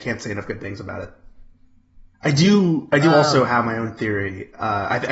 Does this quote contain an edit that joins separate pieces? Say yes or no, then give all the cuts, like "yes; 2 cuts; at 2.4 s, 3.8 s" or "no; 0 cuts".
yes; 1 cut; at 2.1 s